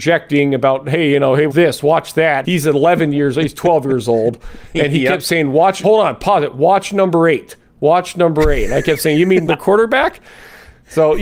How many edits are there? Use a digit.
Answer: 4